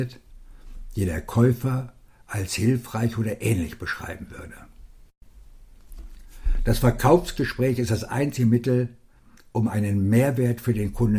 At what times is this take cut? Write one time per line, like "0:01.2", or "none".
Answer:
none